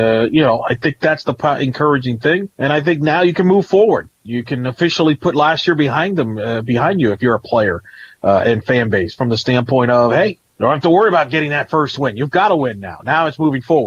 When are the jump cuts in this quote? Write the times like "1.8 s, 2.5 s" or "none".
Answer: none